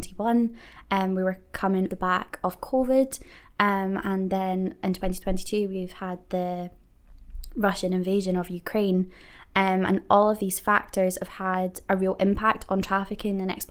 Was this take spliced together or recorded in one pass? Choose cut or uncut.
cut